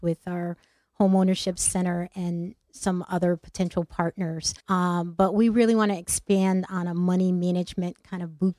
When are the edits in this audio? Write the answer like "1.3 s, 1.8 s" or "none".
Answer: 4.6 s